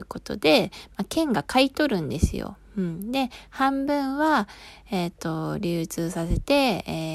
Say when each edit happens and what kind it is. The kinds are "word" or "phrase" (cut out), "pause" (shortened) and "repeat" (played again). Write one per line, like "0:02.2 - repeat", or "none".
none